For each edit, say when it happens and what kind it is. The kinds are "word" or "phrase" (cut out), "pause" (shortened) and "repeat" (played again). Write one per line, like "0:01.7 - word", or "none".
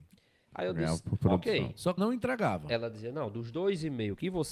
0:02.0 - word